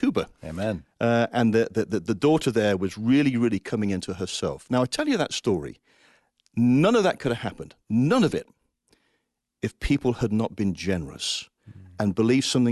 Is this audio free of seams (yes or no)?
yes